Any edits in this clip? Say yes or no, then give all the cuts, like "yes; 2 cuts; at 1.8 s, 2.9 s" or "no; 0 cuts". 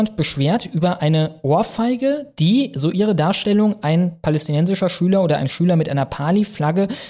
no; 0 cuts